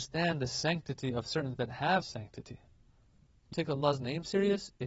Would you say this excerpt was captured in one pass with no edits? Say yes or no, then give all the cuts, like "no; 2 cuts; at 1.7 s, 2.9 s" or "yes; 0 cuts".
no; 3 cuts; at 1.6 s, 2.0 s, 3.5 s